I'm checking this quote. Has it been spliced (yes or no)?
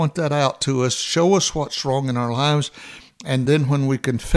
no